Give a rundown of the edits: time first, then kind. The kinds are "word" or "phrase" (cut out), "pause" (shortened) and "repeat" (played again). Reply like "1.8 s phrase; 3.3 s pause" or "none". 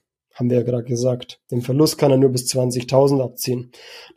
none